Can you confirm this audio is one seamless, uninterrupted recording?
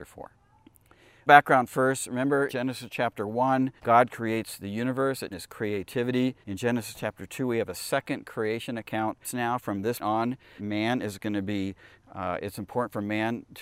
no; 8 cuts; at 1.3 s, 2.5 s, 3.8 s, 5.3 s, 6.4 s, 9.2 s, 10.0 s, 10.6 s

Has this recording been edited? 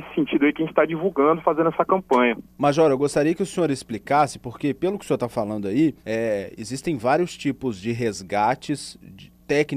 yes; 2 cuts; at 2.5 s, 6.0 s

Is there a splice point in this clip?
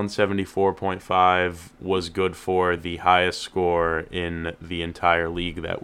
no; 0 cuts

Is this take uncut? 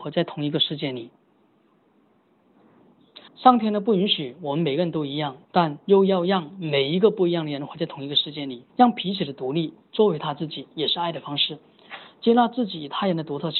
no; 3 cuts; at 3.3 s, 5.4 s, 8.7 s

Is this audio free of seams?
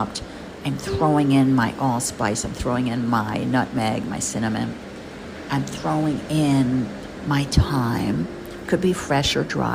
no; 1 cut; at 8.6 s

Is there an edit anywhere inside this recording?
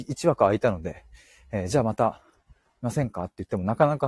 no; 0 cuts

